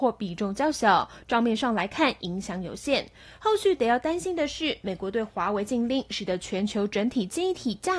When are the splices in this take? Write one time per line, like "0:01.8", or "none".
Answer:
none